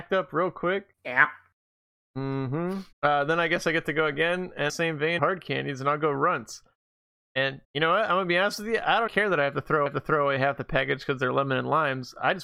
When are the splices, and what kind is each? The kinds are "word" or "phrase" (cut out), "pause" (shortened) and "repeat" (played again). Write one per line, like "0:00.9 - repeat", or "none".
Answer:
0:00.9 - pause
0:02.9 - pause
0:04.7 - phrase
0:05.2 - phrase
0:07.6 - pause
0:09.1 - word
0:09.9 - repeat